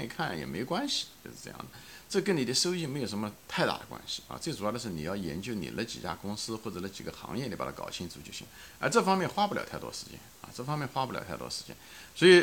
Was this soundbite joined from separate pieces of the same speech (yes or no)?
yes